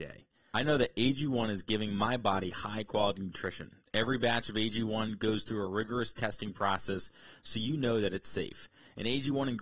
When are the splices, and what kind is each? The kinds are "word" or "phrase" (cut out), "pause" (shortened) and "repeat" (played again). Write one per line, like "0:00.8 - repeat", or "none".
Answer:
none